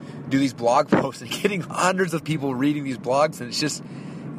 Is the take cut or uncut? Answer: cut